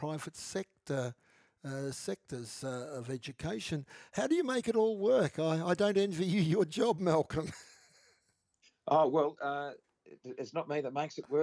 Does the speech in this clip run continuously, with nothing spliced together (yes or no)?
yes